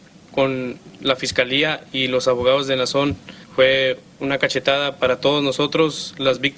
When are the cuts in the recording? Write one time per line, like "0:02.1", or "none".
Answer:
0:03.4